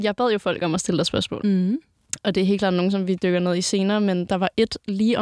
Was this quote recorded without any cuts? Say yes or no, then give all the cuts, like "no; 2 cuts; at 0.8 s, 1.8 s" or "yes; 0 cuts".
yes; 0 cuts